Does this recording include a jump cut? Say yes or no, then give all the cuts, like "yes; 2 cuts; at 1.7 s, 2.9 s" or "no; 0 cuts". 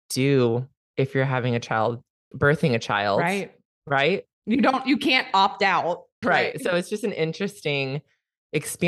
yes; 3 cuts; at 2.3 s, 4.3 s, 6.2 s